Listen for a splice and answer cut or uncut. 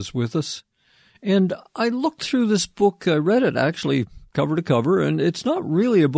uncut